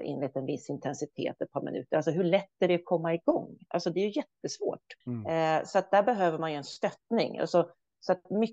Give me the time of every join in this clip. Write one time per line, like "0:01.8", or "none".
0:05.0